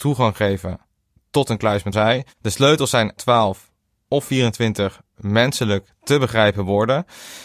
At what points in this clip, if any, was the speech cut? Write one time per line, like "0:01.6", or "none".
0:01.9
0:03.2